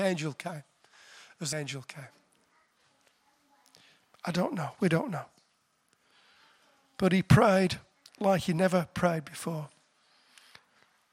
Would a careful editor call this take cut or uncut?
cut